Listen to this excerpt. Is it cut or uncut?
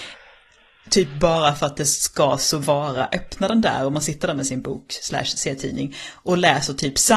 uncut